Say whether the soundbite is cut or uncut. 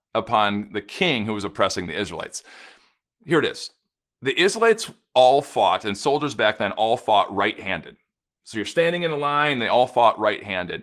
uncut